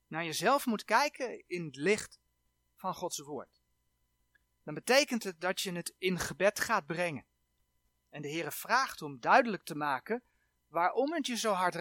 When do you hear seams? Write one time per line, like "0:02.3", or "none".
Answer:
none